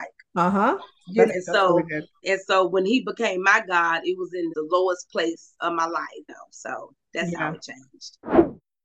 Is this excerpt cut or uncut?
cut